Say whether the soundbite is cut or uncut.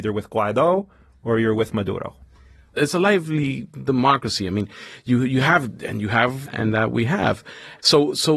cut